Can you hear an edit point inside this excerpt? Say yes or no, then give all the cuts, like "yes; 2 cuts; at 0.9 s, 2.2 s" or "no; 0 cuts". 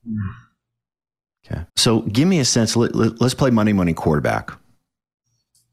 yes; 1 cut; at 1.7 s